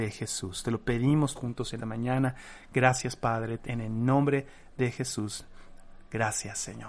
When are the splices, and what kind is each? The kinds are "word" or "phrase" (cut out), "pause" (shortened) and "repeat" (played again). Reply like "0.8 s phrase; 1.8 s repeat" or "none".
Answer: 1.3 s word; 1.8 s word; 3.6 s word